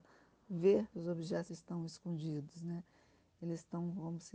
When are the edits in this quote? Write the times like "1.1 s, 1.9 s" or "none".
0.9 s, 1.5 s